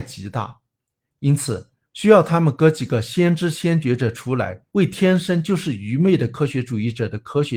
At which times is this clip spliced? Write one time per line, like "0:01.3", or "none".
0:04.7